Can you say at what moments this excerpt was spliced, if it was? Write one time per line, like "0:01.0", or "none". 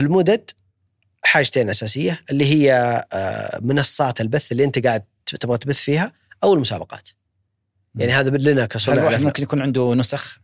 none